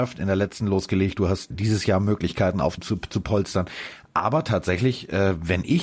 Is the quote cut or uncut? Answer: cut